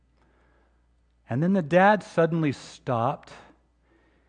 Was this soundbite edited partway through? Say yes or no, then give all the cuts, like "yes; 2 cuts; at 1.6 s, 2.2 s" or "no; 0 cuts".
no; 0 cuts